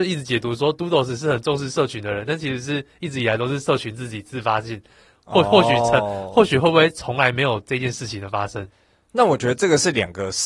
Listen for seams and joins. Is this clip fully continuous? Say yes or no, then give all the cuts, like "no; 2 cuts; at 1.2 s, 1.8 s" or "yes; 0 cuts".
yes; 0 cuts